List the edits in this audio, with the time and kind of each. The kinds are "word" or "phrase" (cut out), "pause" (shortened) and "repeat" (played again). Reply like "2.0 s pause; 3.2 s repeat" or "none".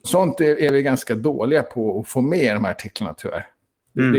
none